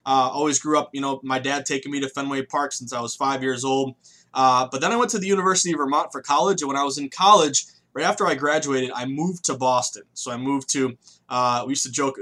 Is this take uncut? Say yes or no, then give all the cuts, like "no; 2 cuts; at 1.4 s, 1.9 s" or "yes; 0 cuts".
yes; 0 cuts